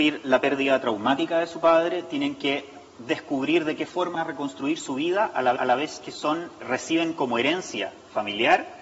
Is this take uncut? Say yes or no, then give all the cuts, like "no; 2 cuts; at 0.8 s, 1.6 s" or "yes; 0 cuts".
no; 4 cuts; at 2.9 s, 4.1 s, 5.6 s, 6.6 s